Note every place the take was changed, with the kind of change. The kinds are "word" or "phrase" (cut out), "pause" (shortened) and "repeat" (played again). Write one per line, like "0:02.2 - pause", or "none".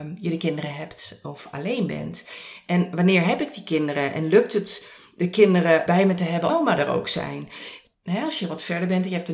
0:05.9 - word
0:06.5 - phrase